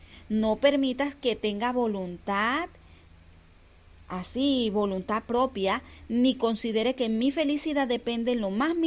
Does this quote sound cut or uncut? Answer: uncut